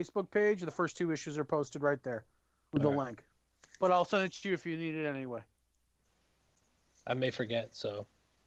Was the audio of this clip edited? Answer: no; 0 cuts

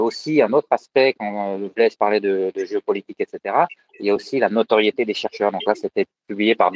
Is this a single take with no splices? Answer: yes; 0 cuts

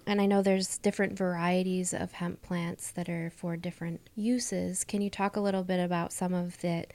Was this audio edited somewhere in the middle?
yes; 1 cut; at 4.1 s

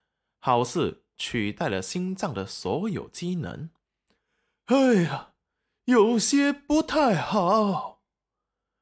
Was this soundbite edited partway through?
no; 0 cuts

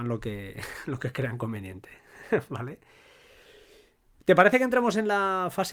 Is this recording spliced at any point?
no; 0 cuts

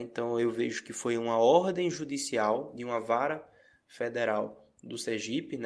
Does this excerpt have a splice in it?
no; 0 cuts

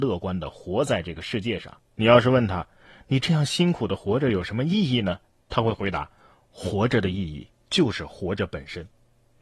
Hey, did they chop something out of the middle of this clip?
no; 0 cuts

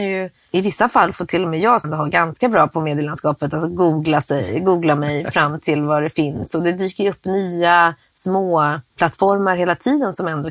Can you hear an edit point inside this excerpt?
yes; 1 cut; at 1.8 s

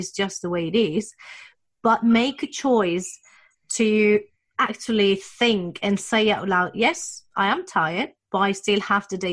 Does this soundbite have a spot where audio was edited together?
no; 0 cuts

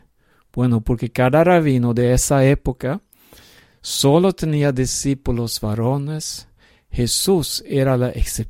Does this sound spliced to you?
no; 0 cuts

